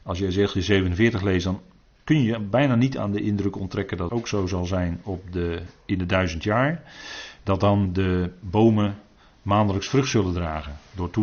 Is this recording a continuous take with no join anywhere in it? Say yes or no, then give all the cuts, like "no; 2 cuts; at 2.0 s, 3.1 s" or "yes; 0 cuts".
no; 1 cut; at 4.1 s